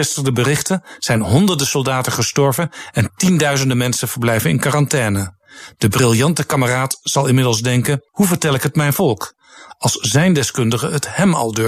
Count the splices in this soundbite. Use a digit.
1